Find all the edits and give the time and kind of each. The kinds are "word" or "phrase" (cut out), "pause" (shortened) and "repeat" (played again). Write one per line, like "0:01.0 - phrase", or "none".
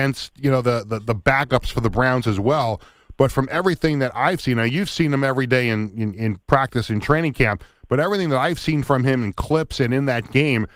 0:06.4 - pause